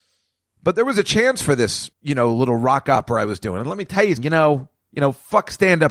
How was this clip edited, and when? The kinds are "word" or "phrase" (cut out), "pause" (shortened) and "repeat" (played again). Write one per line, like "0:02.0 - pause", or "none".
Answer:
0:01.9 - pause
0:04.2 - word